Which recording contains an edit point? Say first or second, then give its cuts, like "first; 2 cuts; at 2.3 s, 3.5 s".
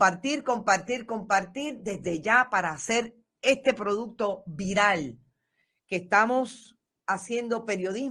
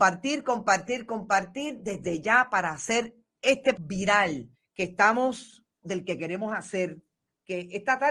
second; 3 cuts; at 3.8 s, 4.5 s, 5.8 s